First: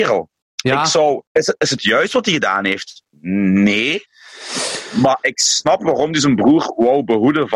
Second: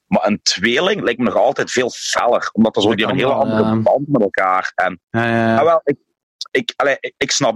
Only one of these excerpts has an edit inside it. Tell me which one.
first; 2 cuts; at 1.3 s, 3.1 s

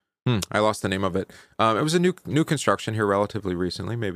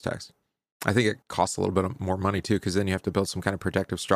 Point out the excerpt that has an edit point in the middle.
second; 1 cut; at 1.2 s

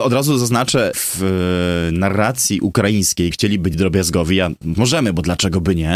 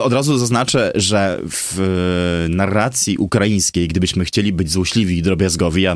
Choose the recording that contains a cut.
first; 4 cuts; at 0.9 s, 3.3 s, 3.7 s, 4.7 s

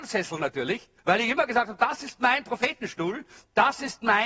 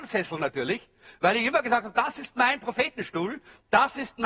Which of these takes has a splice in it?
first; 1 cut; at 1.0 s

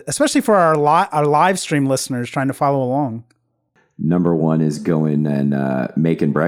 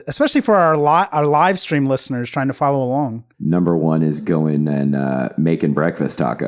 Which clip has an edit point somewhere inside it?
second; 1 cut; at 3.3 s

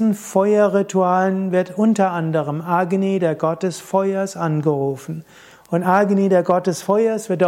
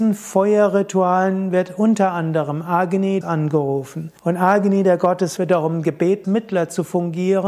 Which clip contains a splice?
second; 4 cuts; at 3.2 s, 4.2 s, 5.4 s, 6.2 s

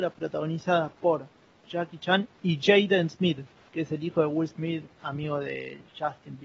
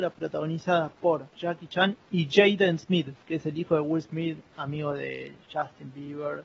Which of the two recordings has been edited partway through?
second; 2 cuts; at 1.3 s, 3.2 s

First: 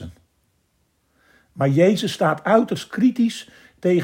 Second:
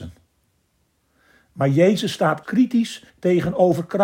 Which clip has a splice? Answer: second; 2 cuts; at 2.4 s, 3.1 s

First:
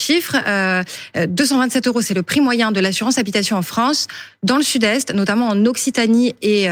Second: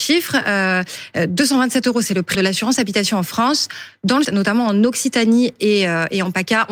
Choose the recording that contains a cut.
second; 2 cuts; at 2.3 s, 4.2 s

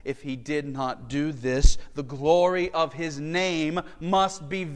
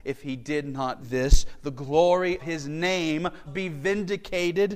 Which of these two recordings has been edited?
second; 3 cuts; at 1.0 s, 2.4 s, 3.5 s

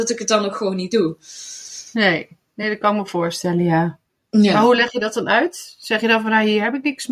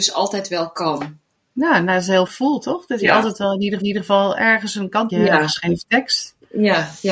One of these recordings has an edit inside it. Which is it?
second; 4 cuts; at 1.3 s, 2.3 s, 3.8 s, 5.1 s

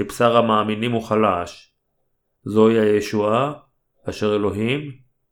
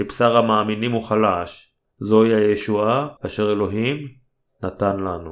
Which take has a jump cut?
second; 2 cuts; at 1.9 s, 3.2 s

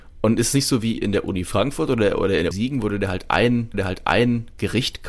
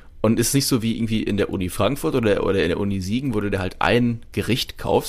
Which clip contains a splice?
first; 3 cuts; at 1.0 s, 2.5 s, 3.7 s

